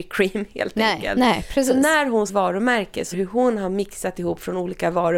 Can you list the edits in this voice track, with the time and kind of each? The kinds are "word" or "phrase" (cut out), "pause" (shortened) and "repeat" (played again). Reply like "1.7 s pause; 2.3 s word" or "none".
2.3 s phrase; 3.1 s phrase